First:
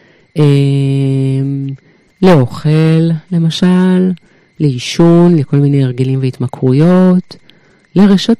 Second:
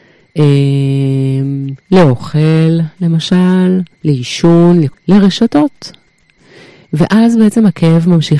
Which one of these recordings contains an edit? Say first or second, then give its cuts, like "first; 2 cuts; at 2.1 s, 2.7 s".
second; 3 cuts; at 1.8 s, 3.9 s, 4.9 s